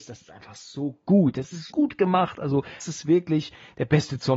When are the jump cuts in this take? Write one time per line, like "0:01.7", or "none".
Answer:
0:01.7
0:02.8